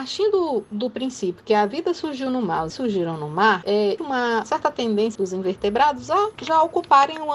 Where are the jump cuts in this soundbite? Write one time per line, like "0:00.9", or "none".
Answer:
0:02.7
0:04.0
0:05.2